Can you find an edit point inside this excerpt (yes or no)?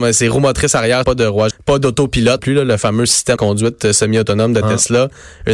yes